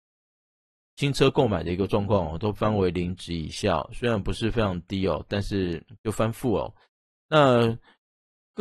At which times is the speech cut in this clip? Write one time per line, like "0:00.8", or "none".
none